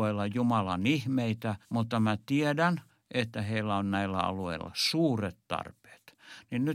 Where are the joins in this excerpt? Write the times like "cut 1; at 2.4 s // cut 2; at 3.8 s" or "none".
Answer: cut 1; at 1.6 s // cut 2; at 2.9 s